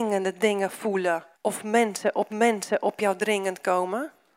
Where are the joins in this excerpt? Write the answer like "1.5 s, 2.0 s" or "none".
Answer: 1.3 s, 2.3 s

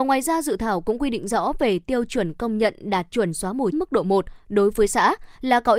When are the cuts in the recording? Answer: 3.7 s

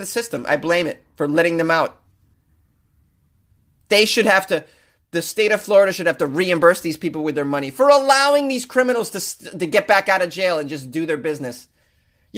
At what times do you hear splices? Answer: none

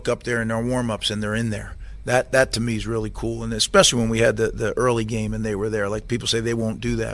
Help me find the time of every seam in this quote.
none

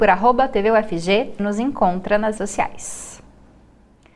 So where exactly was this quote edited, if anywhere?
1.4 s, 2.4 s

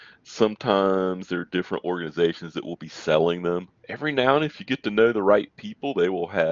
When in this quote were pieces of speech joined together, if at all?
3.8 s

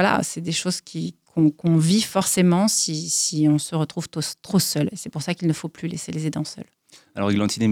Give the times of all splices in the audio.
none

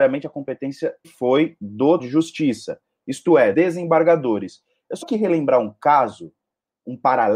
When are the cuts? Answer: 1.0 s, 2.0 s, 3.5 s, 5.0 s

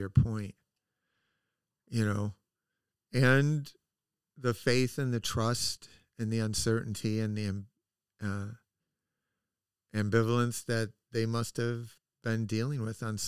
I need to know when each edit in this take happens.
none

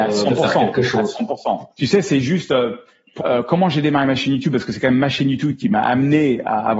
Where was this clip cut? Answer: 1.7 s, 3.2 s

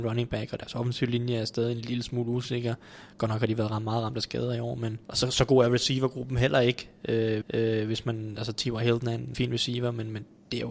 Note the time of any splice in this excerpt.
5.0 s, 7.4 s, 9.3 s

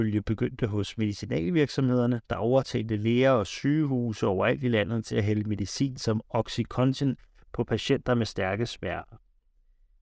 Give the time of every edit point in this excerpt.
none

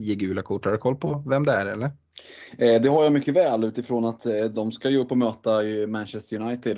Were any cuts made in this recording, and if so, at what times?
none

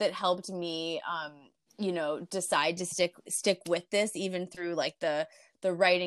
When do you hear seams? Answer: none

